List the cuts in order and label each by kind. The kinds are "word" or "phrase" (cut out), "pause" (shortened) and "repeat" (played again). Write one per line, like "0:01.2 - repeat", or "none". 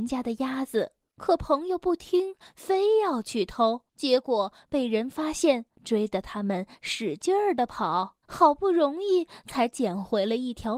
0:01.0 - pause
0:03.9 - pause
0:05.7 - pause
0:08.2 - pause